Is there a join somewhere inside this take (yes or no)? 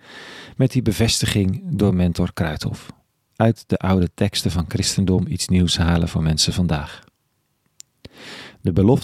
no